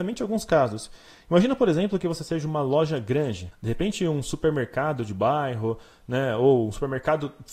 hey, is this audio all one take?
yes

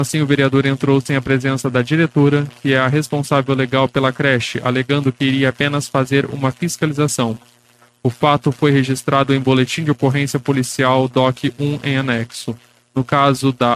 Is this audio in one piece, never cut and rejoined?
yes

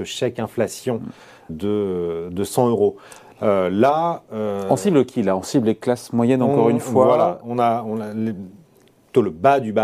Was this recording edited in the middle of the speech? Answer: yes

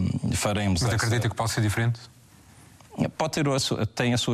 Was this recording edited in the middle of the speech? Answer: no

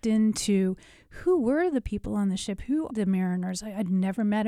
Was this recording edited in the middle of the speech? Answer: yes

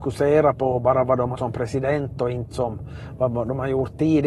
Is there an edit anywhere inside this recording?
yes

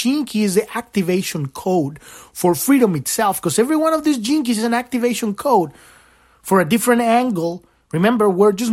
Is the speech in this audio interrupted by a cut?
no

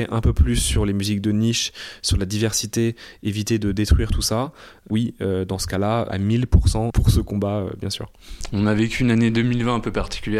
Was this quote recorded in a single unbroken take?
yes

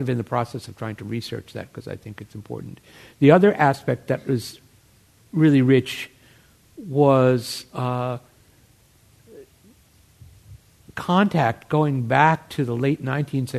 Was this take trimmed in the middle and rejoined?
no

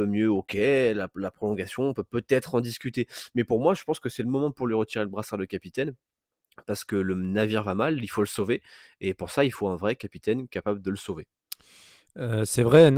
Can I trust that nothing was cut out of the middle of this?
yes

